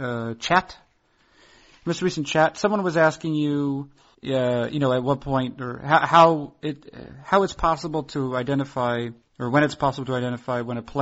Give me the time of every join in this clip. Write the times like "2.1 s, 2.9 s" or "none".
4.1 s, 9.2 s